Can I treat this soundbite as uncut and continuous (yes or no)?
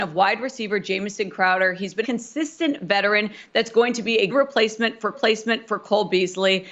no